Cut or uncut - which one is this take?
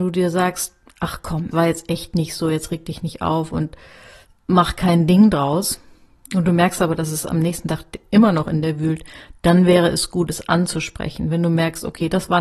cut